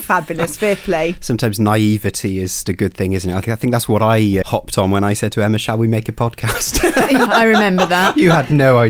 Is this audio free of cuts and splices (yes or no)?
no